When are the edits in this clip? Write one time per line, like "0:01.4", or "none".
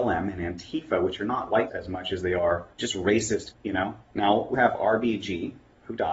0:01.7
0:02.7
0:03.5
0:04.0
0:04.5